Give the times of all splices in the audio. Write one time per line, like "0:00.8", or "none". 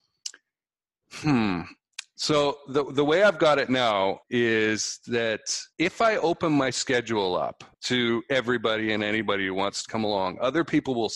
0:04.2
0:05.7
0:07.7